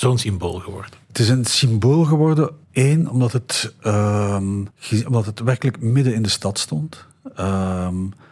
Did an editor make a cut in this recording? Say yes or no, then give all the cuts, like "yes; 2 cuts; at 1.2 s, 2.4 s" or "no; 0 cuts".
yes; 3 cuts; at 1.0 s, 2.6 s, 4.7 s